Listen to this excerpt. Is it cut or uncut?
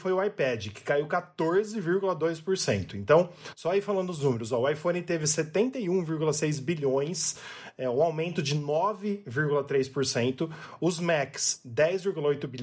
uncut